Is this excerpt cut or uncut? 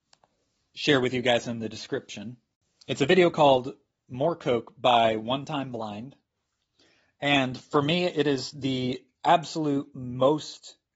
uncut